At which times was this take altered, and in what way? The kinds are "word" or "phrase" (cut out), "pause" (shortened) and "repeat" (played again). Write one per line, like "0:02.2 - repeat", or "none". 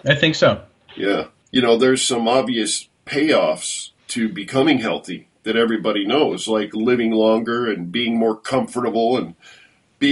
0:04.0 - pause